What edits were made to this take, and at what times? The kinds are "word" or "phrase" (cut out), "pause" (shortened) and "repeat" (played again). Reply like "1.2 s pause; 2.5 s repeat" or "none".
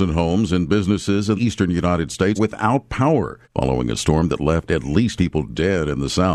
1.4 s word; 2.4 s word; 3.4 s pause; 5.2 s word